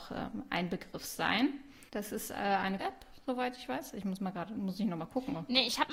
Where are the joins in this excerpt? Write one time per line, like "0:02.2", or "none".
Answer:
0:01.9
0:02.8